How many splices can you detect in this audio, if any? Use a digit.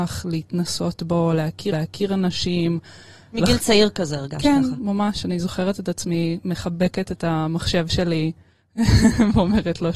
1